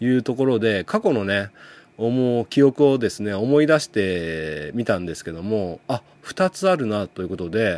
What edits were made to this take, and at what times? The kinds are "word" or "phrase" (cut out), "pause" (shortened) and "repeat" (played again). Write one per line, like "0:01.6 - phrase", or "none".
none